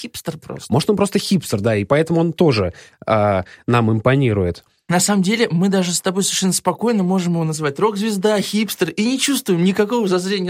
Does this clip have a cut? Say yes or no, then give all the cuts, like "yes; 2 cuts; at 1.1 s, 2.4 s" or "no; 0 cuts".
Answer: no; 0 cuts